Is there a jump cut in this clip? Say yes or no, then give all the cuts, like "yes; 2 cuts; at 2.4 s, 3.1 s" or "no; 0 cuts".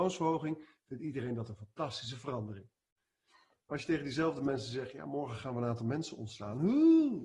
no; 0 cuts